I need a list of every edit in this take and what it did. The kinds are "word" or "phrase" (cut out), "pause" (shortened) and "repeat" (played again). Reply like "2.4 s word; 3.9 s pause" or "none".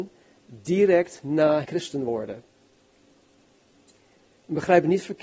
1.6 s word